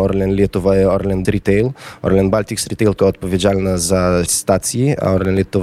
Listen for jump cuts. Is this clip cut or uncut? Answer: cut